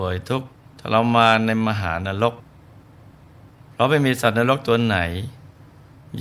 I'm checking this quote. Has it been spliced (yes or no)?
no